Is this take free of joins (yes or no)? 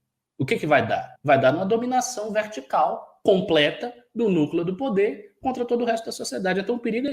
no